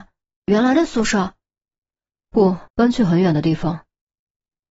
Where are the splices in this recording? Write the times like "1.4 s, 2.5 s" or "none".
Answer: 2.7 s